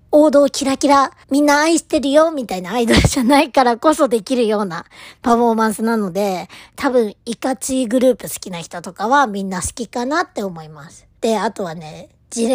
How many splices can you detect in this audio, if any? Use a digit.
2